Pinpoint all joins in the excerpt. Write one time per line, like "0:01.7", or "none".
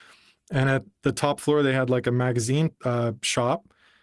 0:02.8